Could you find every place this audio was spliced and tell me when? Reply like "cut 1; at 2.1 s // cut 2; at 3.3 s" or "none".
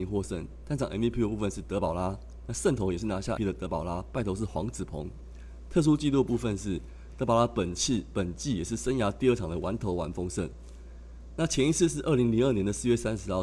cut 1; at 3.4 s